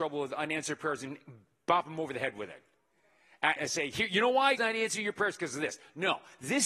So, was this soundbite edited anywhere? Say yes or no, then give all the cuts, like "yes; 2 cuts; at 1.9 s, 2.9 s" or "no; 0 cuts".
yes; 2 cuts; at 3.6 s, 4.6 s